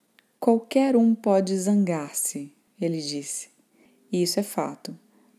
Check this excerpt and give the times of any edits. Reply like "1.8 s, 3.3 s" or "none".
none